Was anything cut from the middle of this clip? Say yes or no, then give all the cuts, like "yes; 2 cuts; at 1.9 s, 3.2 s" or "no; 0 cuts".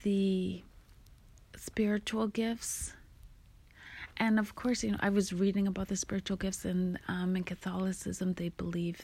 no; 0 cuts